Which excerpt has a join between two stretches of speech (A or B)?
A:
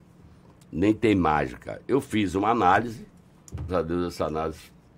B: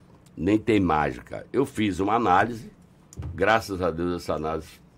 A